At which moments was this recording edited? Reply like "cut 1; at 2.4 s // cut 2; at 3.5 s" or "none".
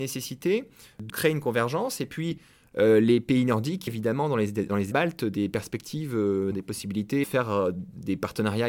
cut 1; at 1.1 s // cut 2; at 3.9 s // cut 3; at 4.9 s // cut 4; at 6.5 s // cut 5; at 7.2 s